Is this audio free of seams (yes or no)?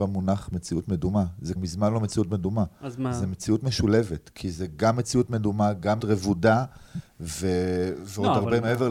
no